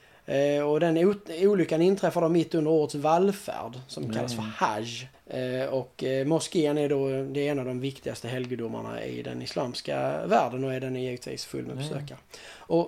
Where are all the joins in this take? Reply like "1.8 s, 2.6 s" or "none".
5.1 s